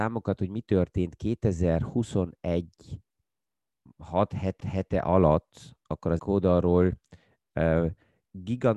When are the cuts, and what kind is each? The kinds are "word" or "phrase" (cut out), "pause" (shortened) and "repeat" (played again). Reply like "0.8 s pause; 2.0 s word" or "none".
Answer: 3.9 s word; 4.6 s repeat; 6.2 s word